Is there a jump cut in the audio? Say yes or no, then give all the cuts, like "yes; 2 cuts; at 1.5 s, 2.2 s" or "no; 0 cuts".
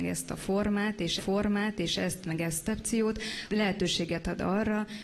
yes; 3 cuts; at 1.2 s, 2.7 s, 3.5 s